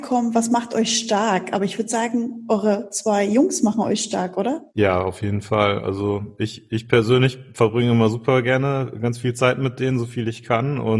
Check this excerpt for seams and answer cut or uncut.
cut